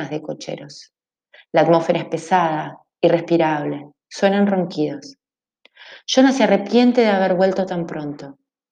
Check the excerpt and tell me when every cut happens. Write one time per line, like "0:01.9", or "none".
none